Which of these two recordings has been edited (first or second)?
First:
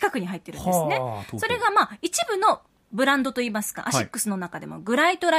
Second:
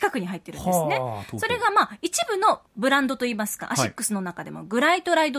second